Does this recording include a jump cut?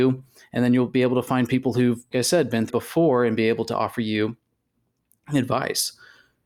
yes; 2 cuts; at 2.1 s, 2.7 s

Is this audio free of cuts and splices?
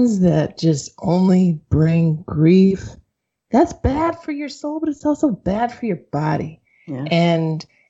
yes; 0 cuts

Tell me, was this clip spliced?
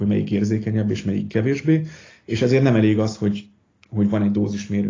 no; 0 cuts

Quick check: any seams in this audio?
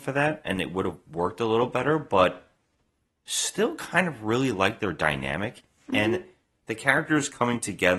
no; 0 cuts

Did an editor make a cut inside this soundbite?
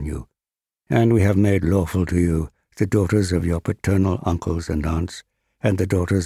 no; 0 cuts

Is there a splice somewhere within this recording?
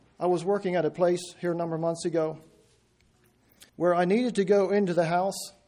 yes; 1 cut; at 3.7 s

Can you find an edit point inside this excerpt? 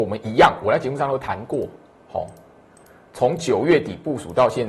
no; 0 cuts

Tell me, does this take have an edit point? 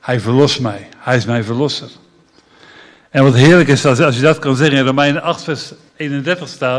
no; 0 cuts

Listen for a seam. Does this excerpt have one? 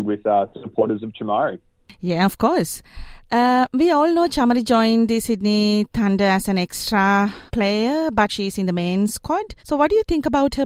yes; 3 cuts; at 7.5 s, 8.3 s, 9.6 s

